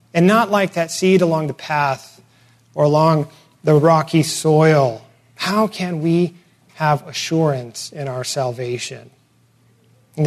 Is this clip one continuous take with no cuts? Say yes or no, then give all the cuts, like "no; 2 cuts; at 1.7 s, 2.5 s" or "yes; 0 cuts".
yes; 0 cuts